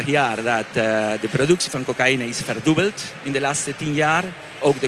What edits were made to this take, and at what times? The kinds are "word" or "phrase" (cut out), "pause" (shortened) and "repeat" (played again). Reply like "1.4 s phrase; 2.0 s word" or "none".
none